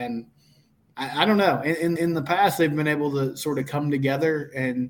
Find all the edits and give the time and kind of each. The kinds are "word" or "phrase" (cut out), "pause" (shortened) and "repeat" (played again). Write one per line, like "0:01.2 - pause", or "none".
0:02.0 - repeat